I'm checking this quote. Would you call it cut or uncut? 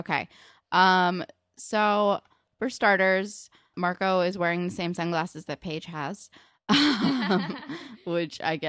cut